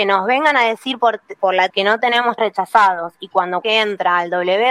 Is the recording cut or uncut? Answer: cut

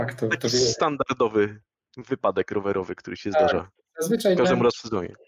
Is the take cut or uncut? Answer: uncut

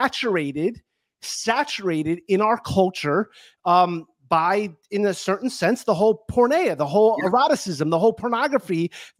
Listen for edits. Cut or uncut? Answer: uncut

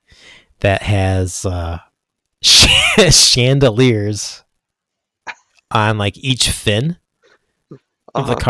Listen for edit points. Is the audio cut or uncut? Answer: uncut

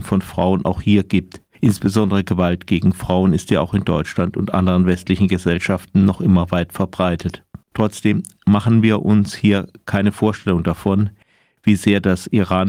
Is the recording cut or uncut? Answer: cut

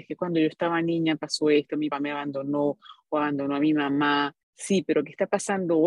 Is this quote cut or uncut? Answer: cut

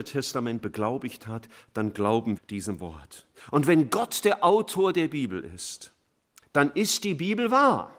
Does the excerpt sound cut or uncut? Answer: cut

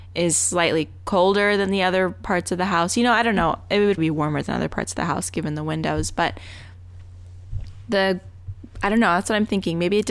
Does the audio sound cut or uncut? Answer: cut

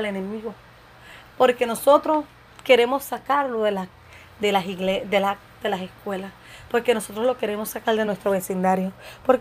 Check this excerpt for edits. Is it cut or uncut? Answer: uncut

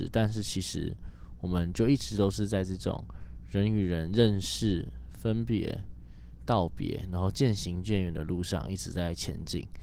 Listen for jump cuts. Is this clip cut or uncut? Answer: uncut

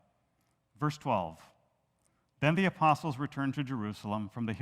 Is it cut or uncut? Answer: uncut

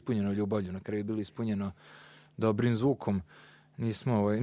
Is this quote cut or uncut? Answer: uncut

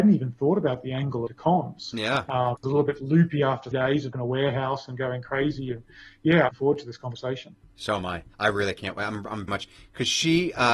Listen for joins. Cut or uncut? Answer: cut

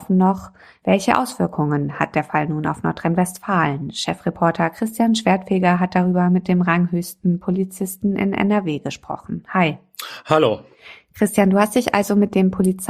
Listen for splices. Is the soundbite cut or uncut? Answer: uncut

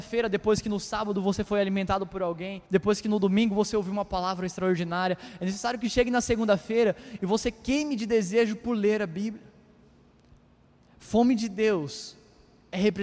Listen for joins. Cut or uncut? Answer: cut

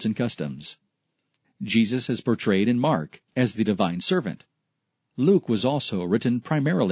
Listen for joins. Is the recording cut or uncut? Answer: uncut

